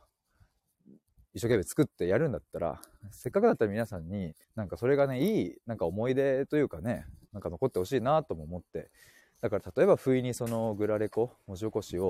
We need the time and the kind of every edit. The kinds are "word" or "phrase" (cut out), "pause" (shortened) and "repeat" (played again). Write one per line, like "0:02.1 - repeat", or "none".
0:04.4 - pause